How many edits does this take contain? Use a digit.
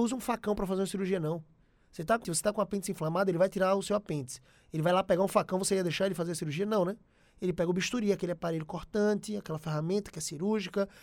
1